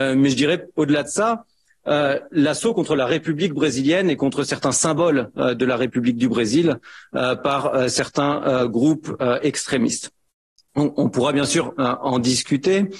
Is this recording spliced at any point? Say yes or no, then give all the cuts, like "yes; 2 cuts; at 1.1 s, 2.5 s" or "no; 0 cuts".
no; 0 cuts